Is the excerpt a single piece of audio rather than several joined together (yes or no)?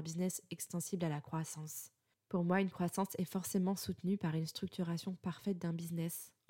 yes